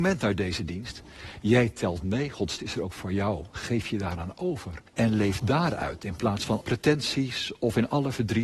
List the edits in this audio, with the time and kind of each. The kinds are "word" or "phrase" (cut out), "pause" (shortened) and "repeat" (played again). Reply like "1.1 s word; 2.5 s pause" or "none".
2.6 s word; 4.9 s pause; 6.6 s word